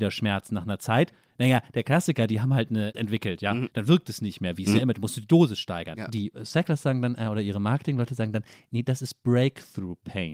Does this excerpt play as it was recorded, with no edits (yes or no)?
no